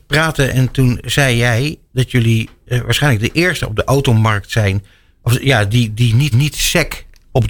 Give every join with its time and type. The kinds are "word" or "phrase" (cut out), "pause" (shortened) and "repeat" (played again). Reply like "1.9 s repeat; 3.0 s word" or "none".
1.9 s word; 6.3 s repeat